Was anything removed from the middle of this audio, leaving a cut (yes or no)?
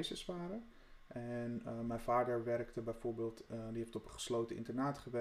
no